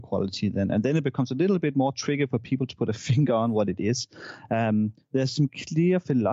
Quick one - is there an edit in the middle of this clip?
no; 0 cuts

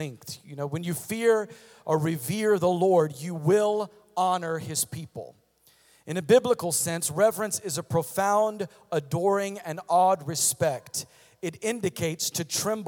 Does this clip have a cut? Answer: no; 0 cuts

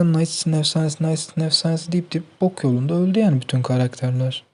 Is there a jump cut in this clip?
no; 0 cuts

